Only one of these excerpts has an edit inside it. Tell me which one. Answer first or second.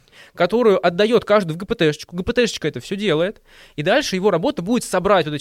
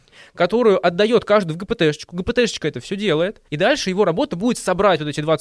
second